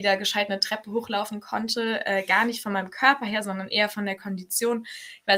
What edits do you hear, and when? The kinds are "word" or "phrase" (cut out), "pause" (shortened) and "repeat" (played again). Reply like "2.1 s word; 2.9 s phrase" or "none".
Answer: none

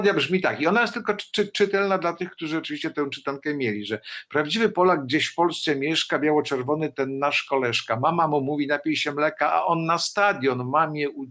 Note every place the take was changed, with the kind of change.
none

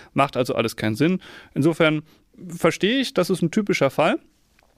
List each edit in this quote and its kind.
none

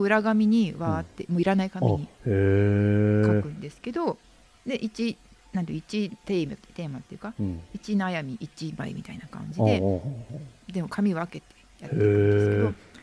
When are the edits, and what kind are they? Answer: 2.1 s pause; 4.4 s pause; 5.3 s pause

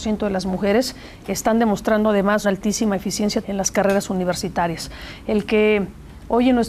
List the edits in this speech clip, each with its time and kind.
1.3 s word; 2.4 s word; 3.4 s word

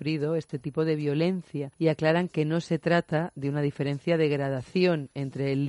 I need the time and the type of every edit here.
1.7 s pause

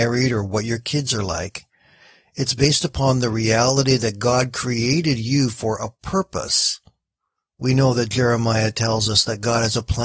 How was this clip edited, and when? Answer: none

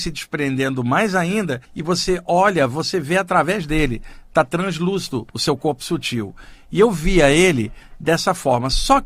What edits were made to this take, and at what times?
1.6 s pause; 5.3 s pause

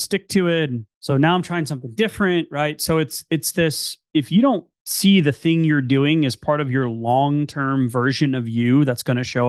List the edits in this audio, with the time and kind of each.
none

